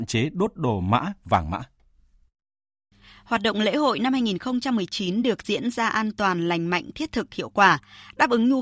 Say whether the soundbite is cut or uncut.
uncut